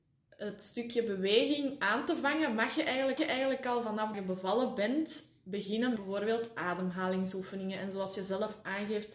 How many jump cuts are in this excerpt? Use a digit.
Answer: 3